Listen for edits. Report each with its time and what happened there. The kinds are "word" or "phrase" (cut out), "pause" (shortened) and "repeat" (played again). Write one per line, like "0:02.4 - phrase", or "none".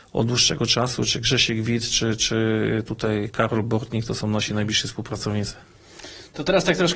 none